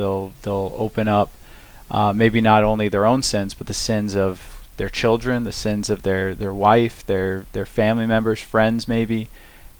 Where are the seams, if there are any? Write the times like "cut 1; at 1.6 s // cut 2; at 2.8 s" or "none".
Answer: none